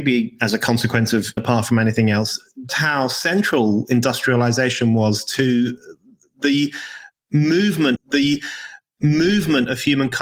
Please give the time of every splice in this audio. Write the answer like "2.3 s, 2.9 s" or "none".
1.4 s, 2.7 s, 8.0 s